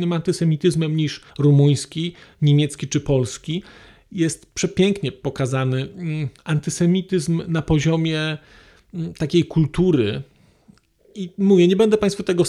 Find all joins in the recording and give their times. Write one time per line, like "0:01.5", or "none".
0:01.3
0:06.4

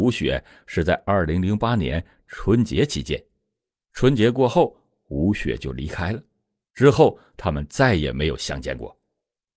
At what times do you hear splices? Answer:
none

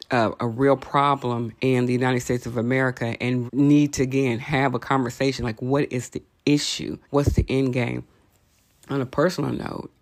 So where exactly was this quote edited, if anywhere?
0:01.6
0:03.5
0:07.0

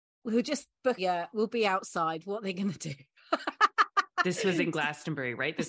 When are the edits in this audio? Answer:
0:01.0

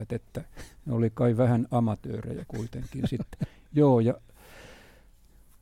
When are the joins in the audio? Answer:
none

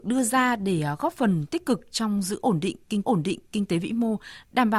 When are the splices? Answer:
0:03.0

